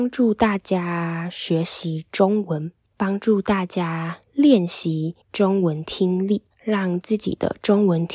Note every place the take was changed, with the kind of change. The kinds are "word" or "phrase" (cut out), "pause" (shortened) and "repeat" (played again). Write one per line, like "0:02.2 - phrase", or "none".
0:02.9 - pause
0:04.2 - pause
0:05.2 - pause
0:06.5 - pause